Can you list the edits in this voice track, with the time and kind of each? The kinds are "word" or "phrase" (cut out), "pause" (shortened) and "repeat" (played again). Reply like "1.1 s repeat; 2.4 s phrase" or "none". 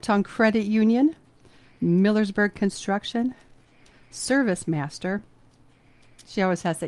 none